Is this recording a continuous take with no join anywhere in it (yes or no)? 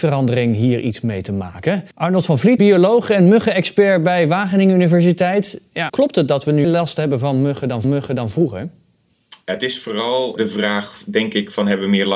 no